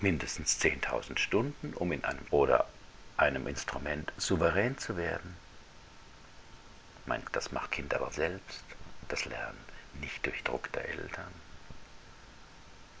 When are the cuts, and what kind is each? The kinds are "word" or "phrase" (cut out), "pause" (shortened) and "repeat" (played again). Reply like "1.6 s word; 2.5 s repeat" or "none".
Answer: 2.2 s word; 7.2 s word; 7.7 s word; 8.1 s word; 9.2 s word; 10.4 s word